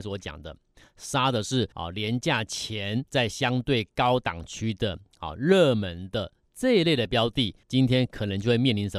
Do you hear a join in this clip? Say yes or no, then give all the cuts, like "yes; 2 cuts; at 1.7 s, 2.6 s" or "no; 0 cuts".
yes; 3 cuts; at 1.7 s, 3.1 s, 7.6 s